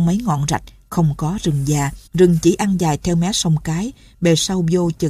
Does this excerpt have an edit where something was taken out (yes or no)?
yes